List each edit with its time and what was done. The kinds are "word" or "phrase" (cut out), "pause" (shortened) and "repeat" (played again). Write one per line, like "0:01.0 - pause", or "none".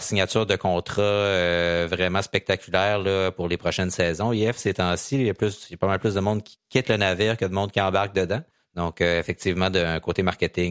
0:08.5 - pause